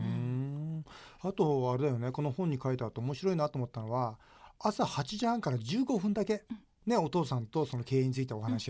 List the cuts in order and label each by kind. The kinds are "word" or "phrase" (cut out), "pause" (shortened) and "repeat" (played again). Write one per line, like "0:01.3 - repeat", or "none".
none